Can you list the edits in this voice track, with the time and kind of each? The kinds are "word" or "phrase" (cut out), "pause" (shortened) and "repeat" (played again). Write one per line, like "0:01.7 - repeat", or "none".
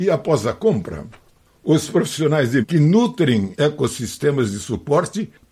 0:02.6 - word
0:03.6 - word